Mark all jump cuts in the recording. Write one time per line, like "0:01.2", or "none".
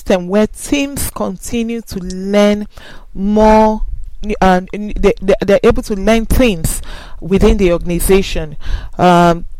none